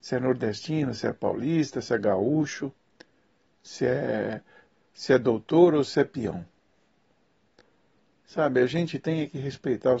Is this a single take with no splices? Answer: yes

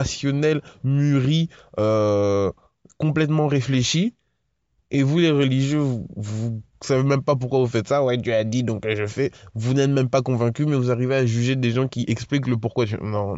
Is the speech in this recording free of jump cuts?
yes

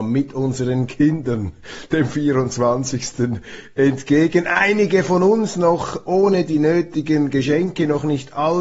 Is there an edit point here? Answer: no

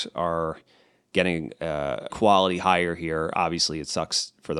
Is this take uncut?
no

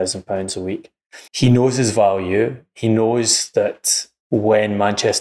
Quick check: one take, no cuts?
no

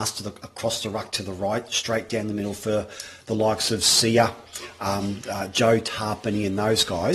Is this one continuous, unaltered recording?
yes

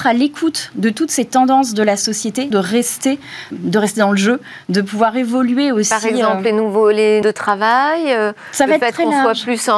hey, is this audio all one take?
no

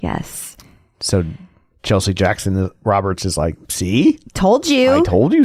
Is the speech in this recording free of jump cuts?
yes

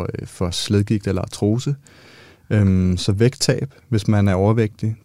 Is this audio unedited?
yes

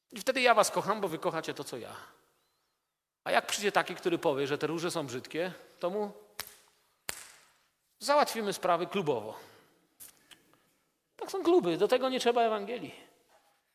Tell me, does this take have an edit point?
no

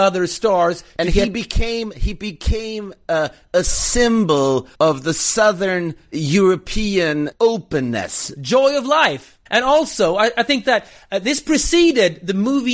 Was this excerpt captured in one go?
no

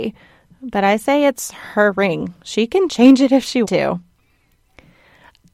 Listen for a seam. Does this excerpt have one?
yes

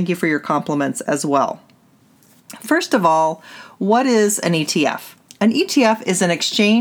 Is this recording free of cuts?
yes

